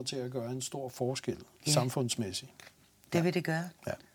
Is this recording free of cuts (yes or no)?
yes